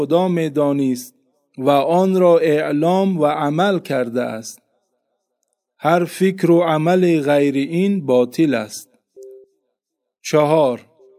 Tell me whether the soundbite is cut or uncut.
uncut